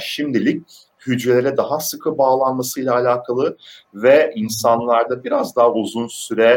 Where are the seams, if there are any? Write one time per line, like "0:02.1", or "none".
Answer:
none